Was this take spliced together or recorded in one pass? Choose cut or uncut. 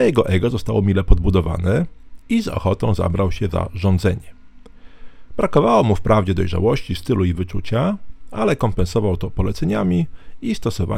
uncut